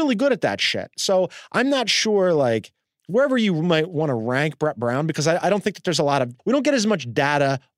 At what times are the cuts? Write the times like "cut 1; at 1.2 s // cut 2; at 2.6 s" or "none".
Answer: cut 1; at 6.4 s